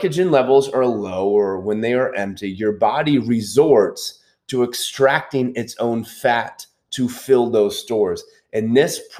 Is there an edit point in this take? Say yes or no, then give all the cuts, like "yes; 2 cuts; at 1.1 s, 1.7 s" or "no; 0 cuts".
no; 0 cuts